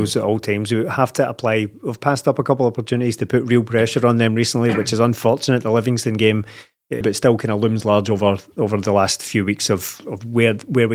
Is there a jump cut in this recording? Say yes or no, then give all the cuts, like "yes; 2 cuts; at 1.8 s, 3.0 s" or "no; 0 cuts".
yes; 1 cut; at 7.0 s